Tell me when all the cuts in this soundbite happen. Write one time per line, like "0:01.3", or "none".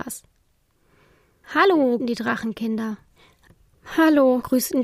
0:02.0